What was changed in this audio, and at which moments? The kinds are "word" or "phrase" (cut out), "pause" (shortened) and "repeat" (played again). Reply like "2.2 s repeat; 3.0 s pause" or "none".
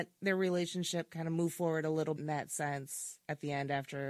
2.2 s word

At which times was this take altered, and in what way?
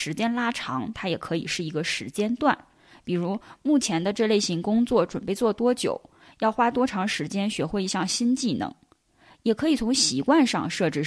none

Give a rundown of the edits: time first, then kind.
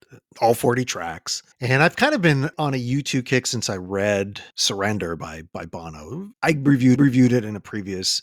1.5 s pause; 4.5 s pause; 6.3 s pause; 7.0 s repeat

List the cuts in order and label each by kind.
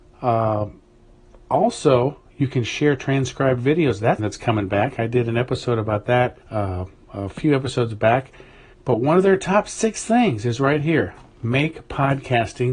4.2 s word; 6.4 s pause; 8.7 s pause

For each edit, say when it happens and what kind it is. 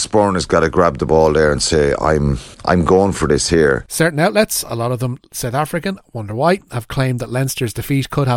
2.5 s pause

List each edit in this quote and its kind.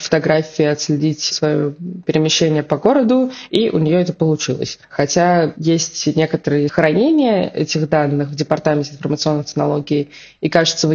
4.8 s pause; 6.7 s word

